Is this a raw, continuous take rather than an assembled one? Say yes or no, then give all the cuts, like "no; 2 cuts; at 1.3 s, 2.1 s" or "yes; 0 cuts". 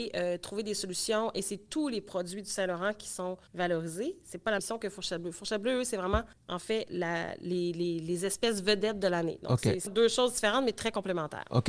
no; 4 cuts; at 3.5 s, 4.6 s, 6.3 s, 9.9 s